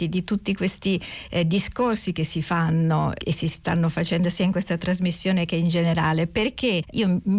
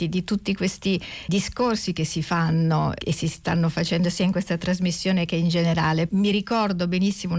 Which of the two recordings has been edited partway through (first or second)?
second